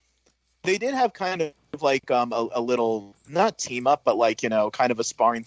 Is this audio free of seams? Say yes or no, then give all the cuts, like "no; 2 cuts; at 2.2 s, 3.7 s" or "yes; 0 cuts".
yes; 0 cuts